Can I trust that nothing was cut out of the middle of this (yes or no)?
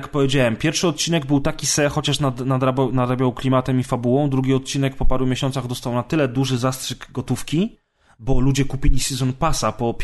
yes